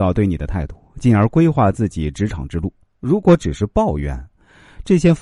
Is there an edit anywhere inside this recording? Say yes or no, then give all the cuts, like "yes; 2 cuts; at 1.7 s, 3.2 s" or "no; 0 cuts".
yes; 1 cut; at 2.8 s